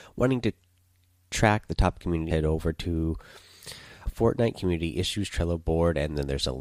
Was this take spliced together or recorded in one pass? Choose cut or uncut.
cut